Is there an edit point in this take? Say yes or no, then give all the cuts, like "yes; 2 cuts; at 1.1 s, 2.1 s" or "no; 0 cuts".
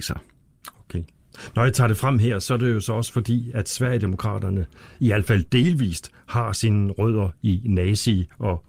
no; 0 cuts